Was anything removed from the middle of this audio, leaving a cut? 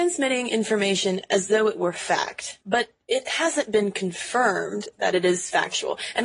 yes; 1 cut; at 2.6 s

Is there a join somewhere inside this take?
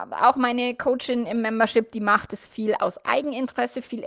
no; 0 cuts

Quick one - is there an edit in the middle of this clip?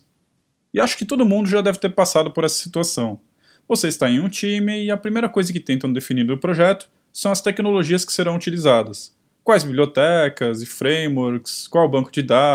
no; 0 cuts

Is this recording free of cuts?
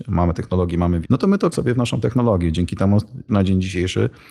no; 3 cuts; at 1.0 s, 1.5 s, 3.3 s

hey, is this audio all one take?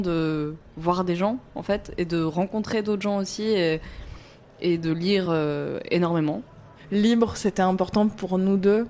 yes; 0 cuts

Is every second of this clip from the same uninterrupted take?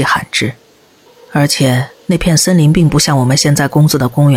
no; 2 cuts; at 1.1 s, 2.0 s

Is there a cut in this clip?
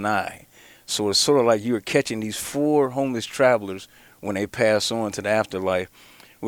no; 0 cuts

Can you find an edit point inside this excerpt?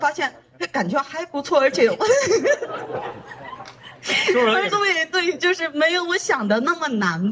yes; 1 cut; at 4.7 s

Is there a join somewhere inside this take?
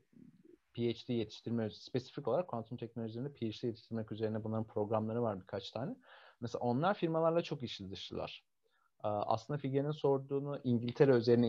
no; 0 cuts

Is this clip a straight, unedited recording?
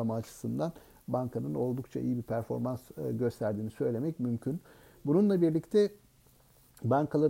yes; 0 cuts

